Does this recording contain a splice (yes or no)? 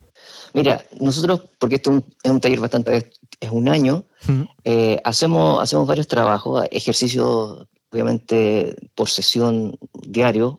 yes